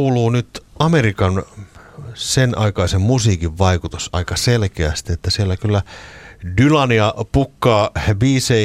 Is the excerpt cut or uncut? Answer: uncut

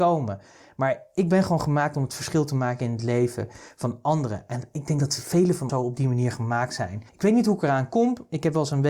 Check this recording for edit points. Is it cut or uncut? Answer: cut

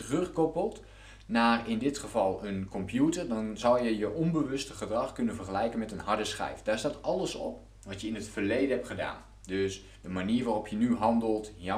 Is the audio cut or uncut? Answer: uncut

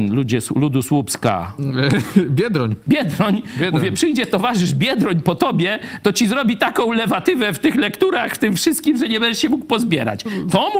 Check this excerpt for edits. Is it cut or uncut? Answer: uncut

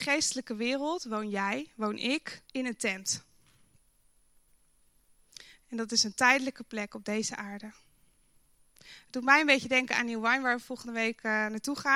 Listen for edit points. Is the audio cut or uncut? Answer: cut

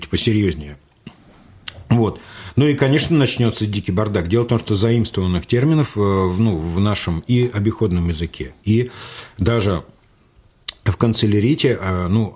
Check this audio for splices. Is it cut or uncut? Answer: uncut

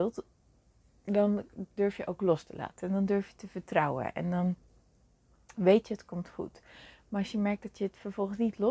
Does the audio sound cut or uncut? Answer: uncut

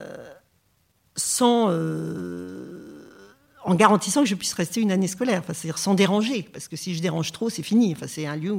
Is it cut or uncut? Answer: uncut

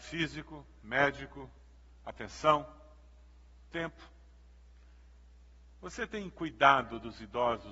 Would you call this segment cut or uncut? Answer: uncut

